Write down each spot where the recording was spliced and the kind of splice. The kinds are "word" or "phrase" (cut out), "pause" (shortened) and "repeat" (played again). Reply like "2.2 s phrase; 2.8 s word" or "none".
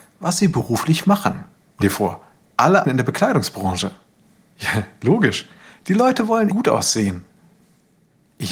1.8 s word; 2.8 s word; 6.5 s word

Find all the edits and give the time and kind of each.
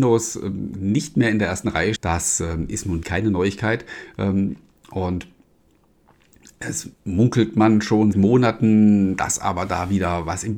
2.0 s phrase; 3.0 s word; 6.9 s pause; 8.1 s phrase

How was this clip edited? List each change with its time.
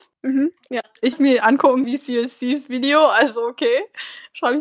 1.1 s word; 1.8 s word

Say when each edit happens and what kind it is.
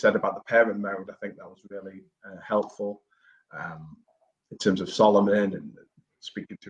none

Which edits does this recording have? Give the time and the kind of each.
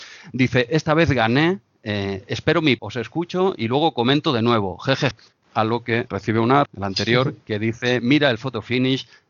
2.8 s word; 5.1 s word; 6.1 s word; 6.7 s phrase

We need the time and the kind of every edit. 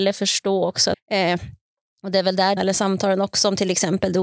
0.9 s word; 2.6 s word

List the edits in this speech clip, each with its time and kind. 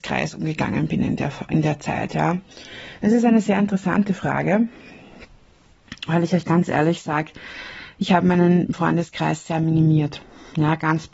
none

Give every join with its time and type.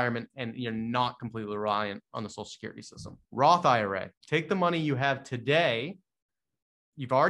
3.2 s pause; 4.2 s pause

